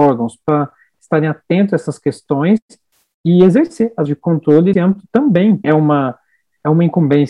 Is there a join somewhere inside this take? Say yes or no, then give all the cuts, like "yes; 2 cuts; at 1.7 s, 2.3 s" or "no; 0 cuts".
yes; 3 cuts; at 4.1 s, 4.7 s, 5.6 s